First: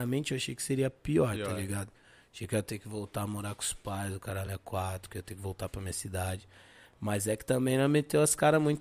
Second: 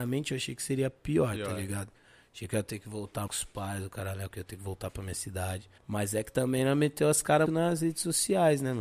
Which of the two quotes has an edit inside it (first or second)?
second